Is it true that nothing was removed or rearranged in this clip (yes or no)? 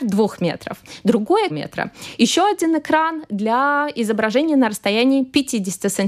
no